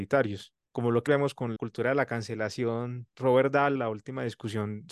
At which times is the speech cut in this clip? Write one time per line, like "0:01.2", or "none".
0:01.1
0:01.6
0:03.8